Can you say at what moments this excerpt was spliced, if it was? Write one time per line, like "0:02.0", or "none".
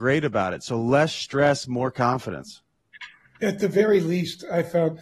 none